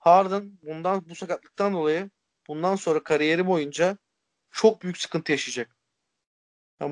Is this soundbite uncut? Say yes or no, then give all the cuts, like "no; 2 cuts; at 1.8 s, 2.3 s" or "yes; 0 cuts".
yes; 0 cuts